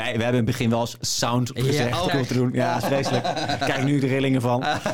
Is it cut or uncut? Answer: cut